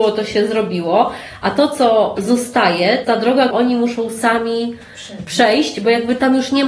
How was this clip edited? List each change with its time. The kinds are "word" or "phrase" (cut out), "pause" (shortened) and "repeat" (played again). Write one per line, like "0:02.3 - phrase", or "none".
0:03.0 - word
0:03.5 - word